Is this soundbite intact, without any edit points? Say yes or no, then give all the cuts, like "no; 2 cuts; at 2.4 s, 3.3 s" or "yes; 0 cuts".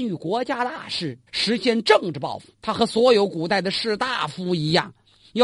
no; 2 cuts; at 1.3 s, 2.5 s